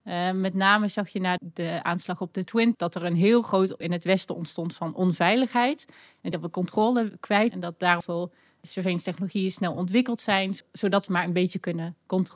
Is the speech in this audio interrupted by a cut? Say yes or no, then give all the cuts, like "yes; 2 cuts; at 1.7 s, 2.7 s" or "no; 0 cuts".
yes; 7 cuts; at 1.4 s, 2.7 s, 3.8 s, 6.3 s, 7.5 s, 8.0 s, 11.1 s